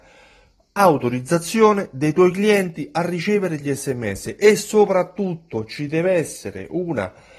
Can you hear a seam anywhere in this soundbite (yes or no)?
no